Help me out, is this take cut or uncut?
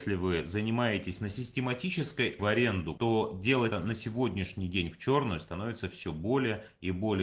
cut